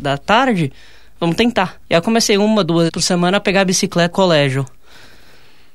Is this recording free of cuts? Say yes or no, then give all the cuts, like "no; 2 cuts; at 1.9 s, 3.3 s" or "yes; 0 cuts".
no; 3 cuts; at 1.8 s, 2.9 s, 4.1 s